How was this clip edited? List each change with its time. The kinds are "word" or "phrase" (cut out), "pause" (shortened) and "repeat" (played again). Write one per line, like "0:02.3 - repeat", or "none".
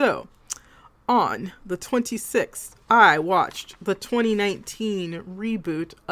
0:02.8 - pause